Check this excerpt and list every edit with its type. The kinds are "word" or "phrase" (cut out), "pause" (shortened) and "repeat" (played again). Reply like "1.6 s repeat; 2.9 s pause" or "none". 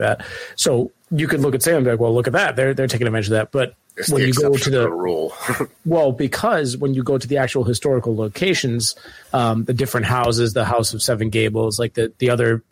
9.2 s pause